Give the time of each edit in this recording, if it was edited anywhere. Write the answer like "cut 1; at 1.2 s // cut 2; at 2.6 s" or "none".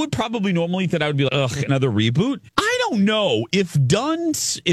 cut 1; at 0.9 s // cut 2; at 1.3 s // cut 3; at 2.5 s